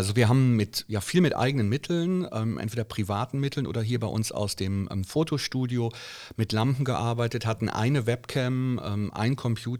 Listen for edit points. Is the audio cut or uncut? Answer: uncut